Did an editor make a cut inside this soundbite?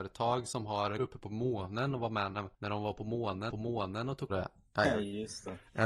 yes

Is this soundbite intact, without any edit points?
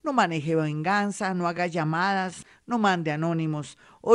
yes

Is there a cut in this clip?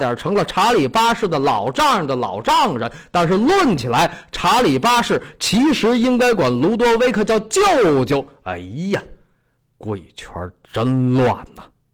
no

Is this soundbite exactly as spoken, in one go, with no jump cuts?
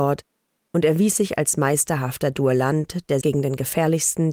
no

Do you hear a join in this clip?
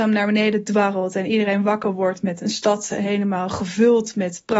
no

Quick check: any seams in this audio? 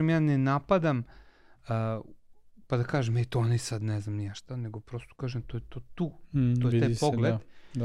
no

